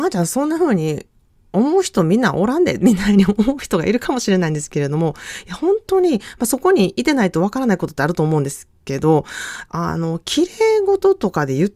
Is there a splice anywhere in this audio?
no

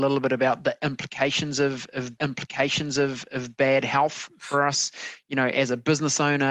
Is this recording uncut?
no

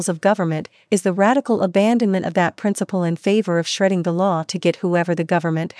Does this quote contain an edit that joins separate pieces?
no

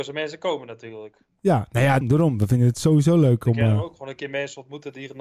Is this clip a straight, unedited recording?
no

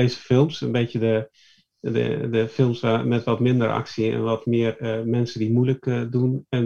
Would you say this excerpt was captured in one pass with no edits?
yes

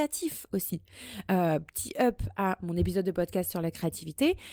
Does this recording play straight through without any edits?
yes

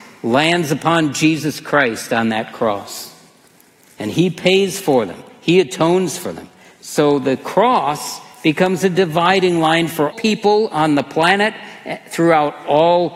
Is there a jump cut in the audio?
yes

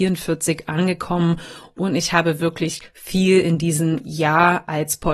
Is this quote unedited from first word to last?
yes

